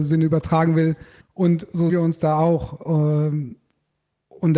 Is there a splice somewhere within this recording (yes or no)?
yes